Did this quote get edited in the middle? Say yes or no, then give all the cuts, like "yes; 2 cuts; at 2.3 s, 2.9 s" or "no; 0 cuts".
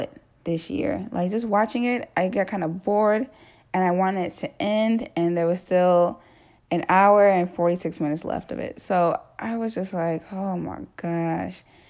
no; 0 cuts